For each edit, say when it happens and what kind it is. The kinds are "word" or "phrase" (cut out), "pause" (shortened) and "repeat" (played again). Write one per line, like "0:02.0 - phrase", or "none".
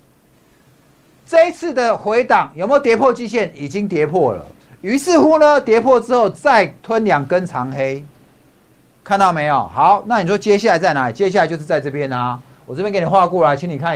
0:04.6 - pause
0:06.8 - pause